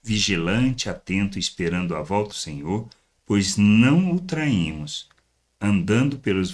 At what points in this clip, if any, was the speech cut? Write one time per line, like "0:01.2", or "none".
0:02.3